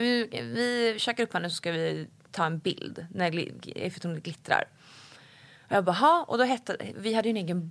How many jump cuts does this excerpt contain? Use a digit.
0